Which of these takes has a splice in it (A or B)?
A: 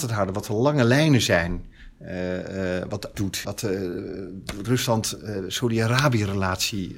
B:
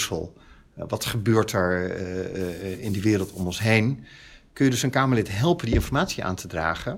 A